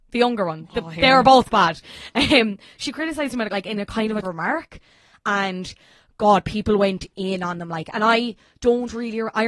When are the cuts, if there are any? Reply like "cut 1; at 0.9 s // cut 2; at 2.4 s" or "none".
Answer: cut 1; at 3.5 s // cut 2; at 4.2 s